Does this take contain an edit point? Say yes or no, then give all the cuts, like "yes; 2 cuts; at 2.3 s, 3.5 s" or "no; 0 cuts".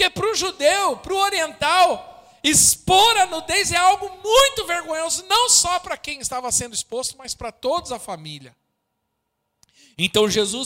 no; 0 cuts